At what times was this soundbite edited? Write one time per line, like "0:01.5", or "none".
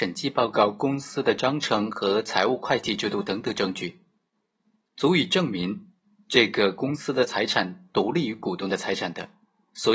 none